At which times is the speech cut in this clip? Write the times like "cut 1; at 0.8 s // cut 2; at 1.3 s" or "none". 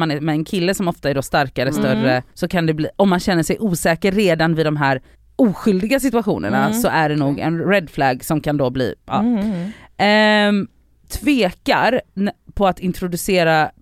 cut 1; at 2.3 s // cut 2; at 5.1 s // cut 3; at 9.0 s // cut 4; at 11.0 s